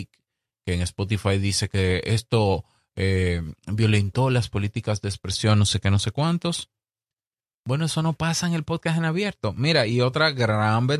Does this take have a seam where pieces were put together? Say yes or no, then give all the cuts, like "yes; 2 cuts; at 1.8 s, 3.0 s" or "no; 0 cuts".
no; 0 cuts